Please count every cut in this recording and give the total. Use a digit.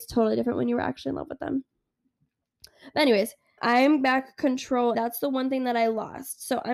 3